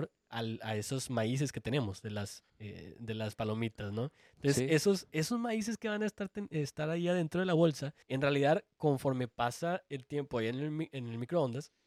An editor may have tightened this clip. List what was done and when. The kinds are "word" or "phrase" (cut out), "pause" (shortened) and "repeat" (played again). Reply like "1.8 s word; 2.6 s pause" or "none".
2.5 s pause; 8.0 s pause